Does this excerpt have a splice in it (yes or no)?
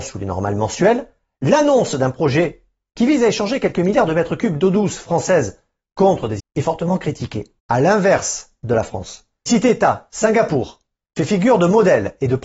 yes